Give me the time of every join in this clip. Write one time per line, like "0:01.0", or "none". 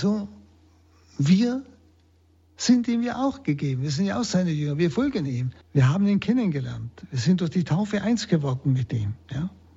0:05.6